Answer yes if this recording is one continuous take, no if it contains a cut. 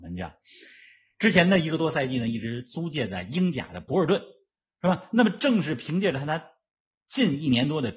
yes